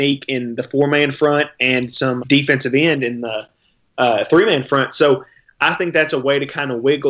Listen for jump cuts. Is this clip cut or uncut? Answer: cut